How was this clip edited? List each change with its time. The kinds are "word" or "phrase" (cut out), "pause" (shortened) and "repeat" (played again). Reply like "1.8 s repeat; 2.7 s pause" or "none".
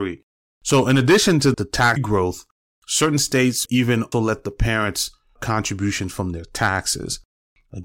1.5 s word; 2.0 s word; 3.7 s word; 4.1 s word; 5.4 s word